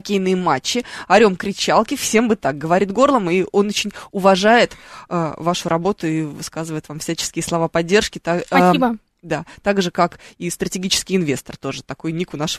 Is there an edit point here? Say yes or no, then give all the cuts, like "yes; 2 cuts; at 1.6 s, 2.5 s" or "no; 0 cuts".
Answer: no; 0 cuts